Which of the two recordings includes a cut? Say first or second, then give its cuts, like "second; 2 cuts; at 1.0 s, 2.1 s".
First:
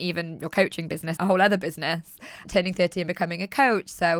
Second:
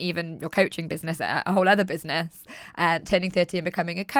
first; 2 cuts; at 1.2 s, 2.4 s